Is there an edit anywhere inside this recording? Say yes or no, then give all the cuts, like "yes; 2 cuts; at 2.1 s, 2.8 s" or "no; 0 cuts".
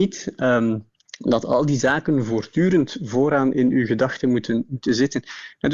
no; 0 cuts